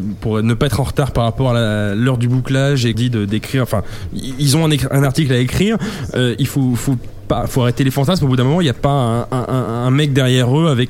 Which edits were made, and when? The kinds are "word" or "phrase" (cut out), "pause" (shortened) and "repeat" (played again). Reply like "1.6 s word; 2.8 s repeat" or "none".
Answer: 2.9 s phrase